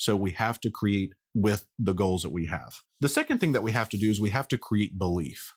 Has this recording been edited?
yes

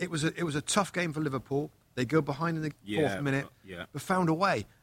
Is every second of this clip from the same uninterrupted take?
no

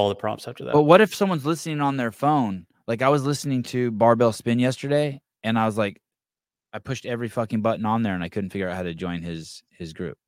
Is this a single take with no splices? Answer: yes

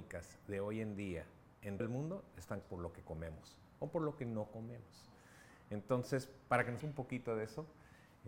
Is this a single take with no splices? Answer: no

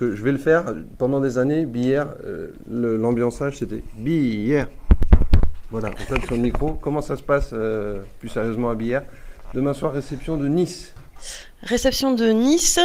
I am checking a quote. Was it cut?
no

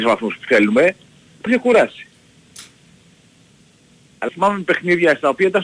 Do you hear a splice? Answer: yes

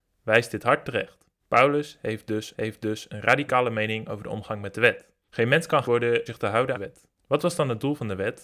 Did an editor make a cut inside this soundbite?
yes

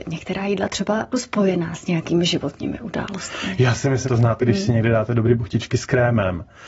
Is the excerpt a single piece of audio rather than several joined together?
no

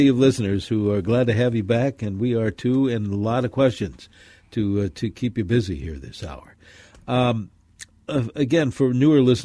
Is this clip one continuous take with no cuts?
yes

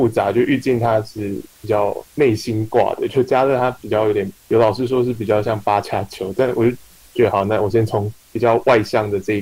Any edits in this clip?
no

